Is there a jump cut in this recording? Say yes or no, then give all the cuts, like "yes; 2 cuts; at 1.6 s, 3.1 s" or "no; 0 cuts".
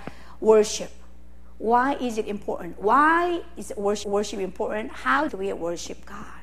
yes; 2 cuts; at 4.0 s, 5.3 s